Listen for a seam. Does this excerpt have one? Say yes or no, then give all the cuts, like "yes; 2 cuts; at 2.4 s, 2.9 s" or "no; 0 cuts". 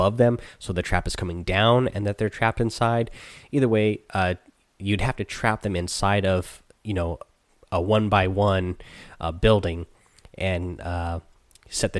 no; 0 cuts